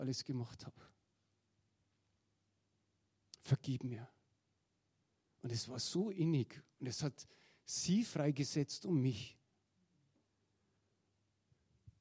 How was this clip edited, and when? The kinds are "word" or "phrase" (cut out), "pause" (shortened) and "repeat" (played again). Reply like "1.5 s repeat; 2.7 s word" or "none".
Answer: none